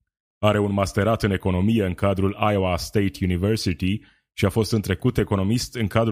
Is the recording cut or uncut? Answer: uncut